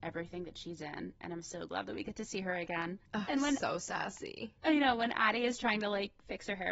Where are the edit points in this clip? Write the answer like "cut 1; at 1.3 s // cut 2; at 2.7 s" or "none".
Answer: cut 1; at 3.1 s

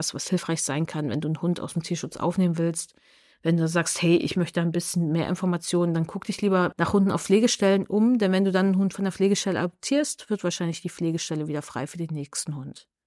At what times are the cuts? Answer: none

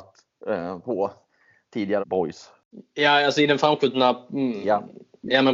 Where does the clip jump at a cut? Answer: cut 1; at 2.0 s

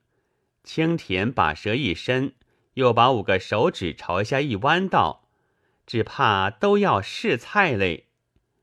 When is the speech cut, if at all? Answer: none

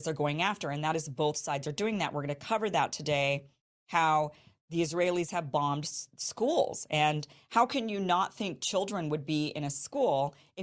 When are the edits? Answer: none

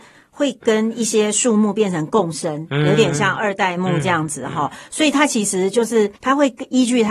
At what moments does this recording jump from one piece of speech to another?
cut 1; at 6.2 s

